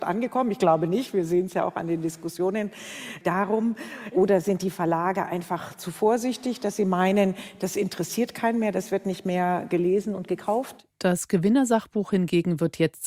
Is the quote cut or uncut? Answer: cut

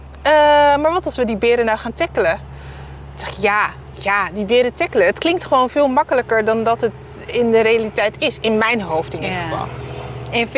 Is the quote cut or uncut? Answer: uncut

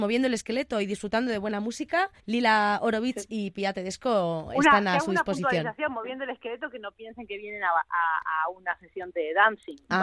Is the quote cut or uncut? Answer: cut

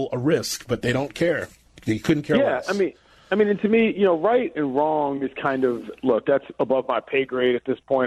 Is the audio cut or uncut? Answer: uncut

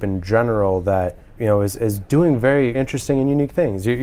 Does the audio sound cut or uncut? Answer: cut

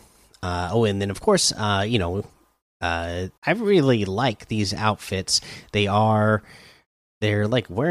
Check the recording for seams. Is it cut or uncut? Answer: cut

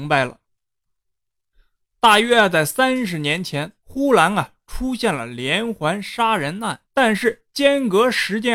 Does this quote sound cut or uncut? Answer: cut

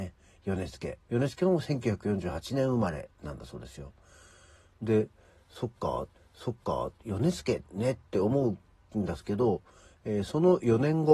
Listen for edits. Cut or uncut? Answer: cut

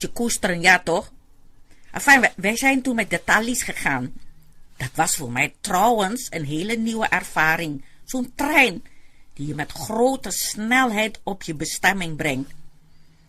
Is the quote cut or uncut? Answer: uncut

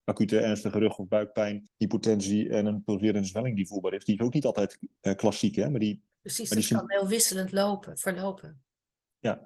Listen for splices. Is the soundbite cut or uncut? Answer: cut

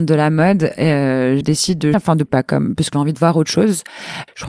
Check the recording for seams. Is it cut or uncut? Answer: cut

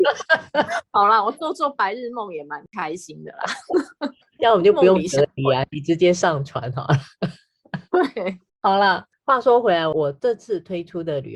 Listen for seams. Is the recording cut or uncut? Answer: cut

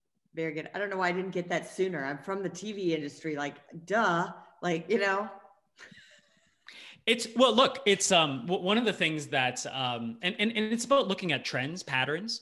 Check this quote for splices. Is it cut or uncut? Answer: uncut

